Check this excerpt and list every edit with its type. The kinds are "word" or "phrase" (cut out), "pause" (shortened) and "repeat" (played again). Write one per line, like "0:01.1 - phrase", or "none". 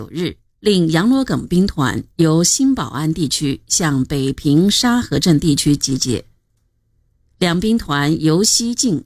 none